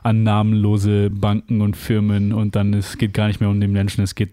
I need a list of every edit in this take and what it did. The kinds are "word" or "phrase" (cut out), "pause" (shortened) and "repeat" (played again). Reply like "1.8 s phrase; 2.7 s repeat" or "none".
none